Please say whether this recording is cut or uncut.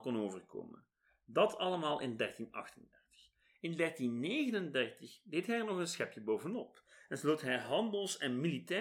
uncut